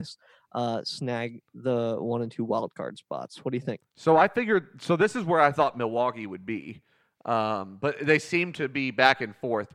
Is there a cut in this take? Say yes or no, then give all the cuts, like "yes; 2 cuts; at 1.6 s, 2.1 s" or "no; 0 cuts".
no; 0 cuts